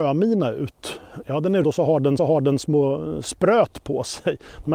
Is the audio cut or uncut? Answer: cut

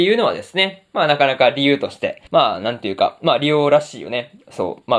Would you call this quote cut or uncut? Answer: cut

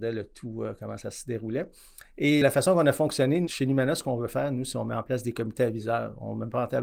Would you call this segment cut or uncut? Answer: cut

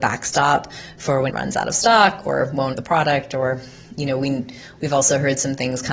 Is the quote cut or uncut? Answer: cut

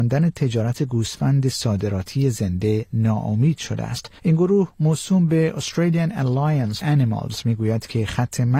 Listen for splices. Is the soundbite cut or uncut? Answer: cut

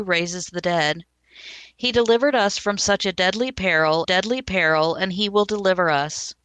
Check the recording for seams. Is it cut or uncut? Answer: cut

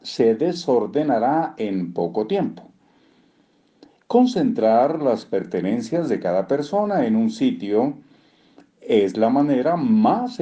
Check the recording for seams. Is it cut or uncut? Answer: uncut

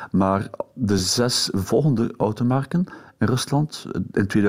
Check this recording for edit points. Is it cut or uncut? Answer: uncut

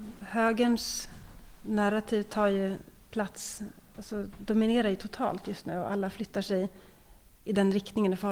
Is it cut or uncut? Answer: uncut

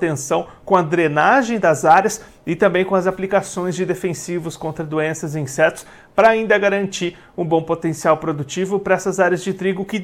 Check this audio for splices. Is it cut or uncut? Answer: uncut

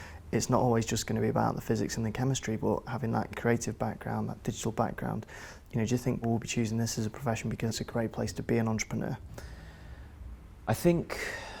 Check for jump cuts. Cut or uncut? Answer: cut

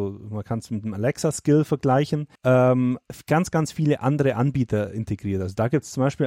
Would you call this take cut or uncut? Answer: cut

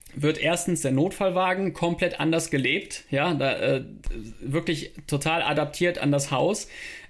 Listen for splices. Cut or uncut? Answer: uncut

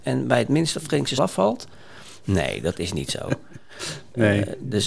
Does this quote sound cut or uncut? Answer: cut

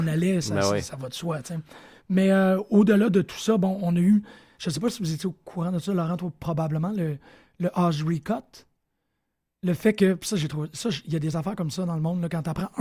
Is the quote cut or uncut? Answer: uncut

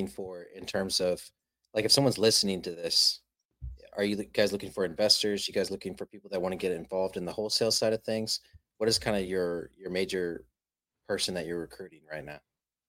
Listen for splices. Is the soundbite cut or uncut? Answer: uncut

